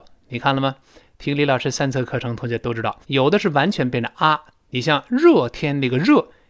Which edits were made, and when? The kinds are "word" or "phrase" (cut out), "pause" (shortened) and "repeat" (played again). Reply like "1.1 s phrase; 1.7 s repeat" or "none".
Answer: 3.0 s pause